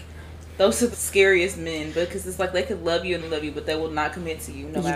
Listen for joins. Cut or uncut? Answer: cut